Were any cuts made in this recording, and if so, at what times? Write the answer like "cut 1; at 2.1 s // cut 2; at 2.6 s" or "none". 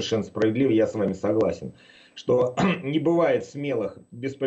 none